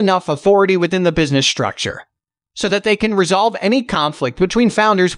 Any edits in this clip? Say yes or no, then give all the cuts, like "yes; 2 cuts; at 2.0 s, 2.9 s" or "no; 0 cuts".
no; 0 cuts